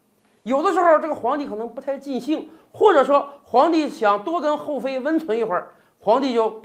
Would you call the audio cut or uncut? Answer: uncut